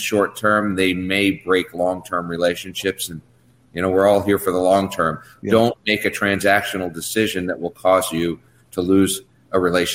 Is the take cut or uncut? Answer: uncut